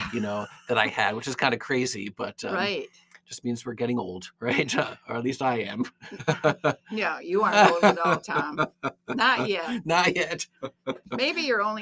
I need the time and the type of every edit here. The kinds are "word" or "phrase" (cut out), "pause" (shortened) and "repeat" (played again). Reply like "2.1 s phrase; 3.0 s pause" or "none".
4.3 s pause